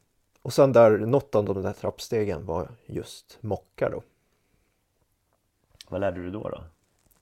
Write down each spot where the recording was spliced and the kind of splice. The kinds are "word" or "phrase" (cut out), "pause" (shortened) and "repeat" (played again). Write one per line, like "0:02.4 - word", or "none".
none